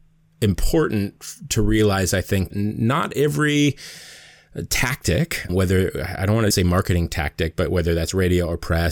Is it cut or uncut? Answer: cut